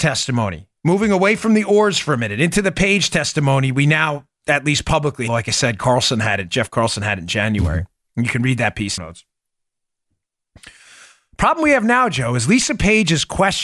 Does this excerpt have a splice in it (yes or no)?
yes